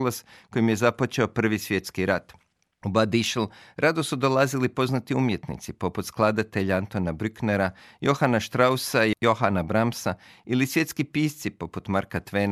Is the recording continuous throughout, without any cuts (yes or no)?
yes